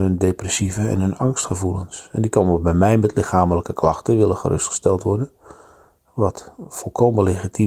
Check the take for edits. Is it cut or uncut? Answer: uncut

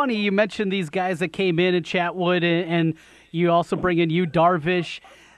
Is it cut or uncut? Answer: uncut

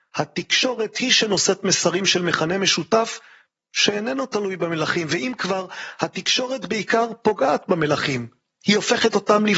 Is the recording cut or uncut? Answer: uncut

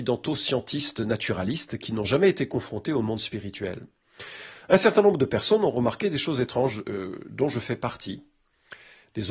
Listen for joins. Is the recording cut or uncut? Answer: uncut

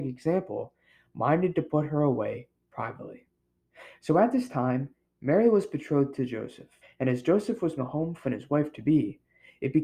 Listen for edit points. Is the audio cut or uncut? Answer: cut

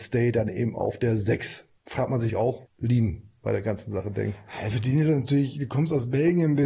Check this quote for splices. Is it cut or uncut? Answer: cut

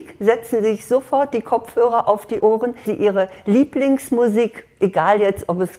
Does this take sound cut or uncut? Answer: cut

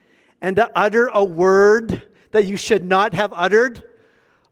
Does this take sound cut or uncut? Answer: uncut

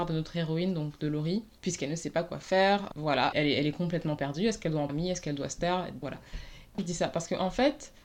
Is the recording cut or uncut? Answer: cut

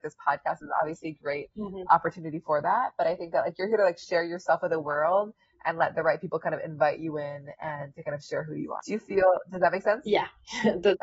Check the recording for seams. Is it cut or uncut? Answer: uncut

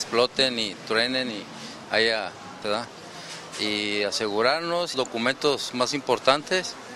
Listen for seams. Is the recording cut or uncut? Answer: cut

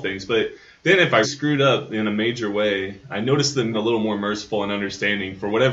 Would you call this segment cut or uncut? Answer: cut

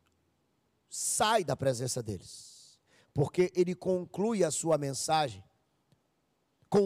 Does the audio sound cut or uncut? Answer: uncut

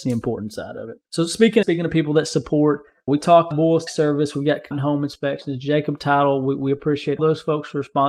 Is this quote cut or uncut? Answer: cut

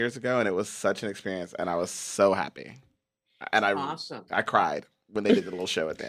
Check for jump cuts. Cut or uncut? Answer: uncut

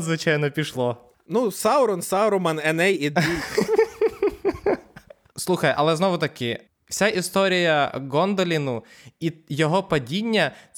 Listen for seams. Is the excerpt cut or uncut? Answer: uncut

